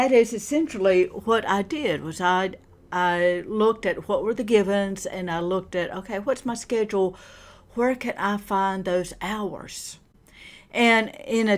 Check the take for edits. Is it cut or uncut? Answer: uncut